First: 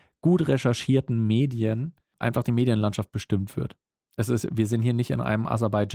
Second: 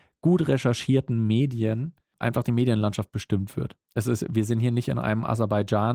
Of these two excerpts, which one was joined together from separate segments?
second; 1 cut; at 3.8 s

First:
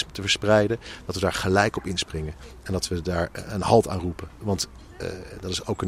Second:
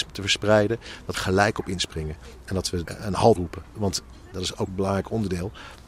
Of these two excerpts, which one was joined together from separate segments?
second; 5 cuts; at 1.1 s, 2.8 s, 3.4 s, 4.3 s, 4.7 s

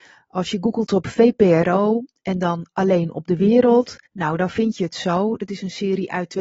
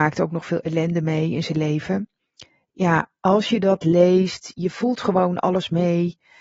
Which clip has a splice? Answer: first; 1 cut; at 4.1 s

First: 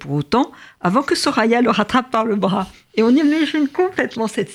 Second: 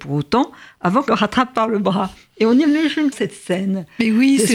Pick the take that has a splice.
second; 2 cuts; at 1.1 s, 3.1 s

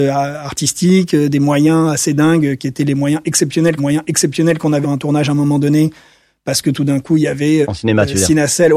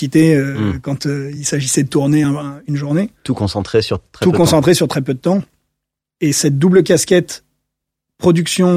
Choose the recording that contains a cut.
first; 3 cuts; at 3.8 s, 4.8 s, 7.6 s

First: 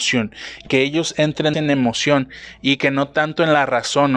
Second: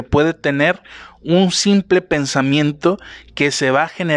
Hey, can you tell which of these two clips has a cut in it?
first; 1 cut; at 1.5 s

